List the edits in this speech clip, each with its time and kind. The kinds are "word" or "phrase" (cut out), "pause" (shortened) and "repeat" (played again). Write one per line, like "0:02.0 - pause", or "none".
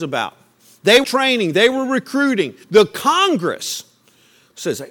0:01.0 - word
0:02.6 - pause

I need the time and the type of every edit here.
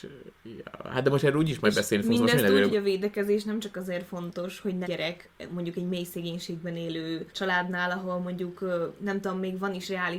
0:02.7 - phrase
0:04.8 - phrase
0:07.3 - pause

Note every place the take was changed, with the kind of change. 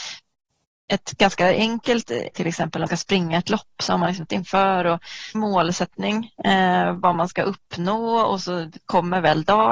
0:02.3 - phrase
0:02.9 - phrase
0:04.3 - word
0:05.3 - word
0:06.3 - pause

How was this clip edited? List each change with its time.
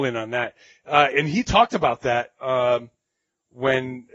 none

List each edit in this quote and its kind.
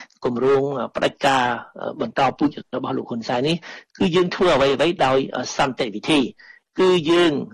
none

